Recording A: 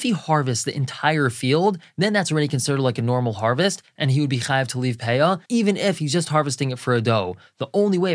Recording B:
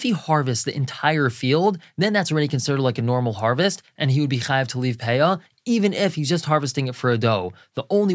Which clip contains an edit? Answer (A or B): A